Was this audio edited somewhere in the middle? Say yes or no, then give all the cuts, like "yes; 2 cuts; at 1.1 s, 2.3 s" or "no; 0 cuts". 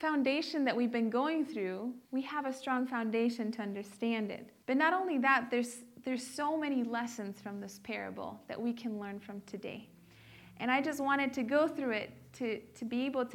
yes; 2 cuts; at 2.0 s, 4.6 s